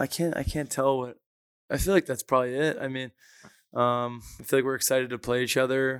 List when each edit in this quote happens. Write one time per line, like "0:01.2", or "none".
none